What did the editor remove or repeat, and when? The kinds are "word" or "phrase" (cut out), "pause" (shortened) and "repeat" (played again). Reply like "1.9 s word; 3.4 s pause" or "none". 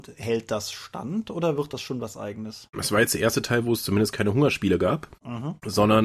none